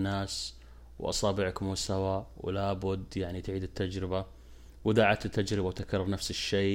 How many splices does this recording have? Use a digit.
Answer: 0